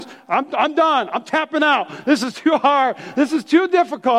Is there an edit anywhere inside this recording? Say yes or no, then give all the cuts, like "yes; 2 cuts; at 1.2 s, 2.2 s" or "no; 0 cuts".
no; 0 cuts